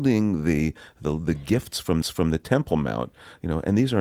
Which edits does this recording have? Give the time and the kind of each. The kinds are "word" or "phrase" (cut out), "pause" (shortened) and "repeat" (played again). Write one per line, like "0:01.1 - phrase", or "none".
0:02.0 - repeat

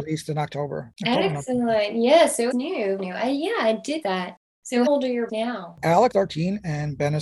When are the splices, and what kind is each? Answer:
0:02.5 - word
0:03.0 - word
0:04.0 - word
0:04.9 - word
0:05.3 - word
0:06.1 - word

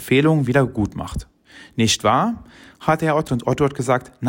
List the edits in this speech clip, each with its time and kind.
0:03.3 - word

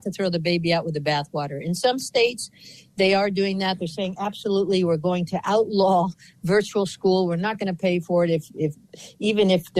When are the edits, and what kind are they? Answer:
none

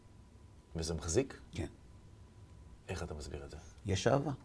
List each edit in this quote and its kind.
0:02.8 - pause

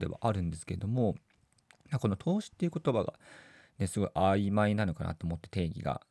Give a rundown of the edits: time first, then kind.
none

